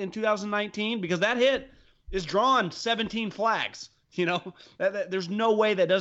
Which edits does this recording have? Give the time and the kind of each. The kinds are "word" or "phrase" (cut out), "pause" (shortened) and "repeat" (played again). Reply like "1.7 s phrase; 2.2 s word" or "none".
none